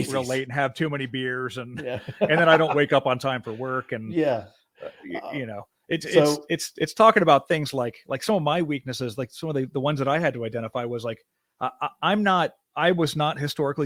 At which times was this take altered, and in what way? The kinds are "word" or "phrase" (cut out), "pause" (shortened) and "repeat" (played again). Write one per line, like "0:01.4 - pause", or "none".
none

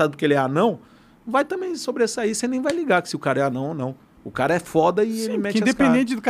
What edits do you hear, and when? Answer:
none

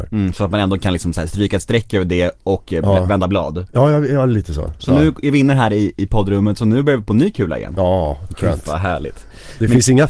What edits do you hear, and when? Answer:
none

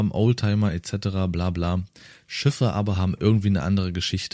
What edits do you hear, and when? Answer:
none

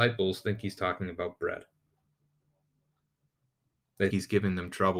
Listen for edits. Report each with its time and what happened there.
0:04.1 - word

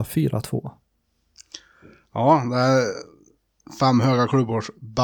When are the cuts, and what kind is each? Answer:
none

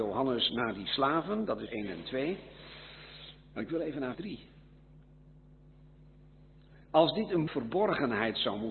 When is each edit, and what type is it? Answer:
0:01.7 - word
0:04.1 - word
0:07.5 - phrase

